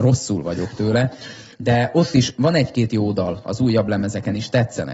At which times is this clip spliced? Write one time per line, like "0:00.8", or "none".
none